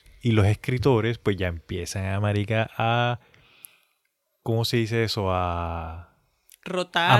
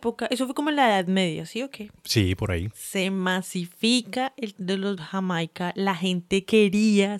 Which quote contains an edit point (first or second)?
second